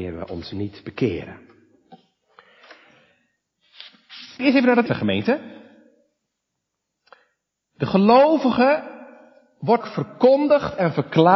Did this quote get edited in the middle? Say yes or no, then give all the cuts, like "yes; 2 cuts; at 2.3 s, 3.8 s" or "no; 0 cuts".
yes; 3 cuts; at 4.4 s, 4.9 s, 9.8 s